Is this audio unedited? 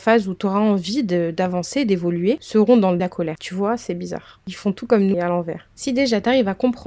no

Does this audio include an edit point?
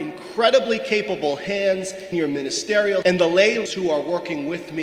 yes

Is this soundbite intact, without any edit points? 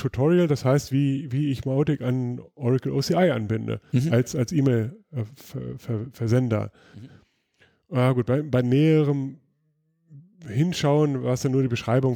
yes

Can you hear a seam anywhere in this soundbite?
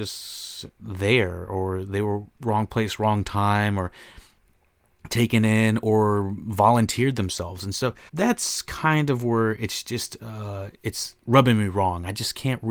yes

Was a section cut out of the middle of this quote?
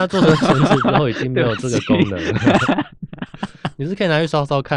no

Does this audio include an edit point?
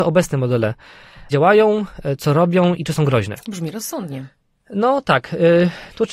yes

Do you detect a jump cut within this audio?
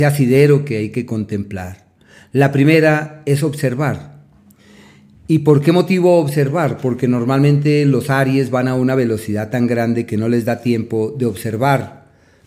no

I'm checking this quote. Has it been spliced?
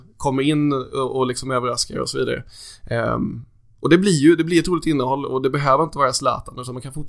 no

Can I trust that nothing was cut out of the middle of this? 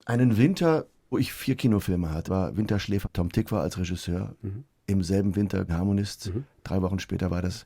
no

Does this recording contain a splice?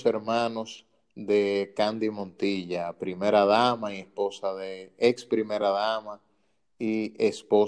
no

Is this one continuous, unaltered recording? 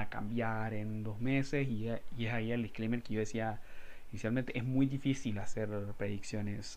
yes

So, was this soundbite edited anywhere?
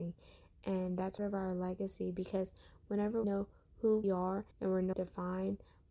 yes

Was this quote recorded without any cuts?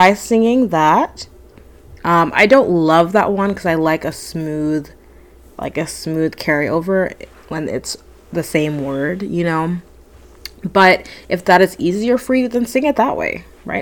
yes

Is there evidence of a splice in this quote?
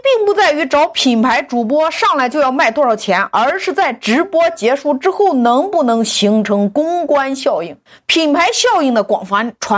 yes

